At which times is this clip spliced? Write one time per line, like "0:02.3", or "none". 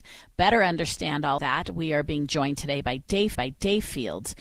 0:01.4
0:03.3